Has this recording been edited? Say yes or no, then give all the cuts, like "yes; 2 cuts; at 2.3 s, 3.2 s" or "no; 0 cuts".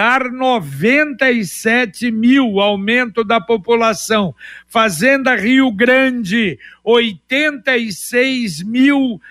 no; 0 cuts